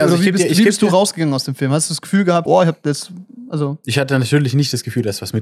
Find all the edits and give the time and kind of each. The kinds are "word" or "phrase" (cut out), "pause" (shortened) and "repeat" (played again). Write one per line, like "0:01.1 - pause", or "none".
0:02.5 - word